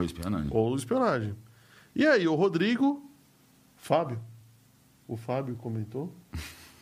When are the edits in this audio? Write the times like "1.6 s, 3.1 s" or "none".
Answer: none